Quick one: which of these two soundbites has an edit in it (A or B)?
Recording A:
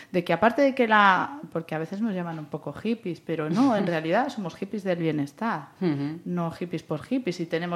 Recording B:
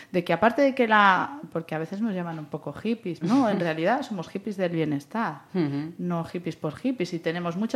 B